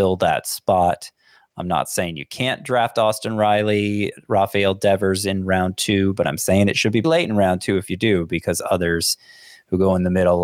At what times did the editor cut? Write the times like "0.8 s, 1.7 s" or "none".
7.0 s